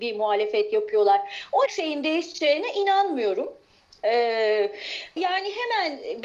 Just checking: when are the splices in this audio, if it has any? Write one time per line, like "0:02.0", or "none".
0:01.7
0:05.2